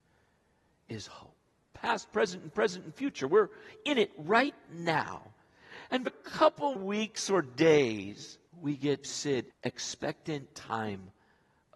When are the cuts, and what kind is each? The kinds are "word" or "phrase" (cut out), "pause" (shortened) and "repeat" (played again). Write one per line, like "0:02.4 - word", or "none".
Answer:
0:01.5 - pause
0:02.5 - repeat
0:06.1 - word
0:06.8 - word
0:08.5 - pause
0:09.0 - word
0:09.5 - phrase